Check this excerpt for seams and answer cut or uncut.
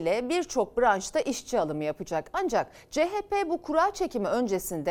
uncut